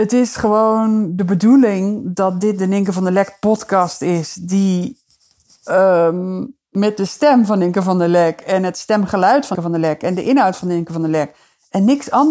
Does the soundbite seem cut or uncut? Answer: cut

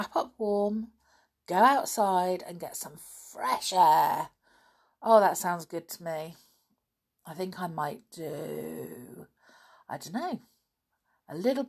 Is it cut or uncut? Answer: uncut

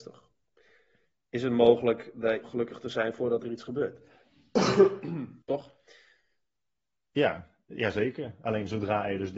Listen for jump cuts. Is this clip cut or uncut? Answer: cut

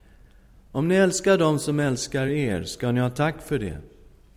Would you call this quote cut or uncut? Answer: uncut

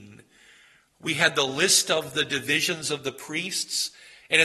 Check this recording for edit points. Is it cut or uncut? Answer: uncut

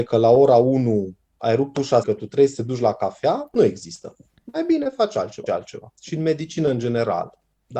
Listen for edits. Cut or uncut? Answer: cut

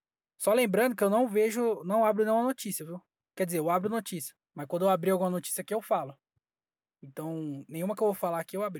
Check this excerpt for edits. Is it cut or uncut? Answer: cut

